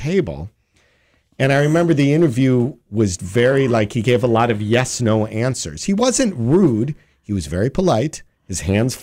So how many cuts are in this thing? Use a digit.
1